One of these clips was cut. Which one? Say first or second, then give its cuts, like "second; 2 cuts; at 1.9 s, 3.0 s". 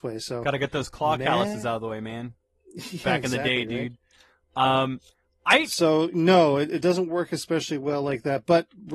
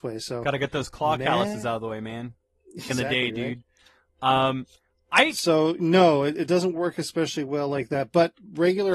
second; 1 cut; at 2.9 s